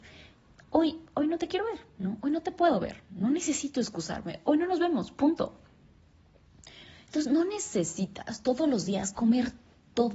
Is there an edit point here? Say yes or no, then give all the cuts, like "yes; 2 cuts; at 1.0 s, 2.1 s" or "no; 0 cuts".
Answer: no; 0 cuts